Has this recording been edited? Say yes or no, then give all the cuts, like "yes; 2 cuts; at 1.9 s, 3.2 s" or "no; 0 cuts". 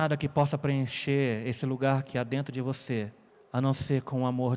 yes; 1 cut; at 3.3 s